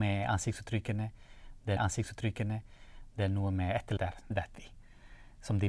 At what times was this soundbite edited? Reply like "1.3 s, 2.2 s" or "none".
1.8 s, 4.0 s, 4.3 s